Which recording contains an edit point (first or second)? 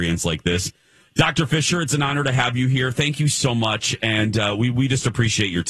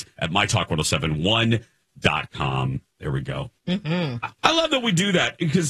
second